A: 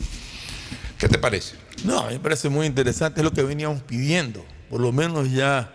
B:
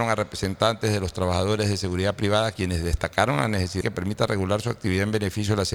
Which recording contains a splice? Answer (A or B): B